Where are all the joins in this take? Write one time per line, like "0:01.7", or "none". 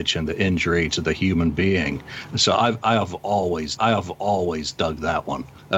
0:03.8